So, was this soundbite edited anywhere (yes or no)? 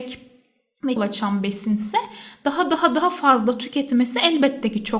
yes